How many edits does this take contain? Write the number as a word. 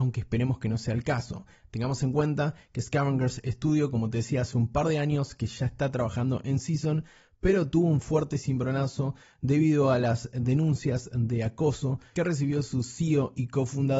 zero